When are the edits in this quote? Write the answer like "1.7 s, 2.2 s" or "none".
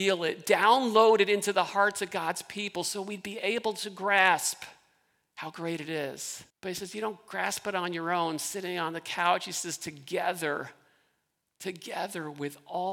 6.5 s